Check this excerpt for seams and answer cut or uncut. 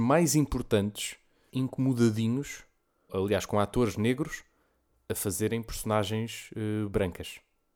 cut